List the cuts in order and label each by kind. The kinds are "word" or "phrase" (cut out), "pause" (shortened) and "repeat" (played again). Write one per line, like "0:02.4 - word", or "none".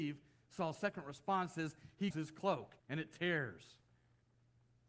0:02.1 - word
0:02.8 - pause